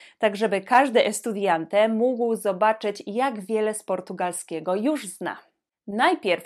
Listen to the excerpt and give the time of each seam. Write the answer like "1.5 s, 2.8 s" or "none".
none